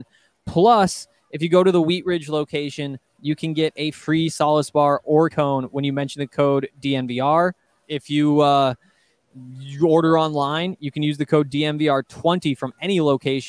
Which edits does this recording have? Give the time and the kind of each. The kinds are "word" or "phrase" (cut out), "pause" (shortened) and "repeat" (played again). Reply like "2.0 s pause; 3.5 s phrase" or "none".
5.3 s word; 7.8 s word